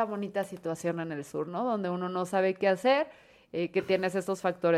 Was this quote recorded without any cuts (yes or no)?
yes